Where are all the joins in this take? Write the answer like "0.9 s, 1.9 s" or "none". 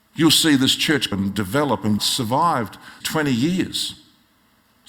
1.1 s, 2.0 s, 3.0 s